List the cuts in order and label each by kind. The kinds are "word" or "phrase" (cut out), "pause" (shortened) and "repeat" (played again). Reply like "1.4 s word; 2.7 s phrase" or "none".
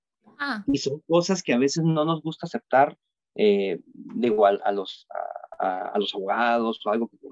none